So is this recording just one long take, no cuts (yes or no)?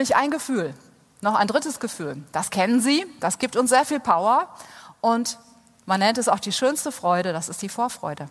yes